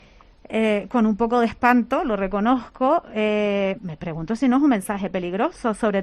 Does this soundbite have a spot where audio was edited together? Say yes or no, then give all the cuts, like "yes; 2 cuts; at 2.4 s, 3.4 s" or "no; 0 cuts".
yes; 1 cut; at 3.8 s